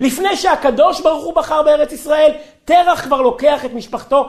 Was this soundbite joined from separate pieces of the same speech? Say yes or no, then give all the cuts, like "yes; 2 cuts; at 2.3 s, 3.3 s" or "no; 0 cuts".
no; 0 cuts